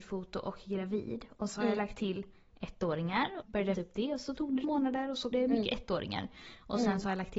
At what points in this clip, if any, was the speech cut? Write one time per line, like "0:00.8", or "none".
0:01.5
0:03.4
0:03.7
0:04.6
0:05.3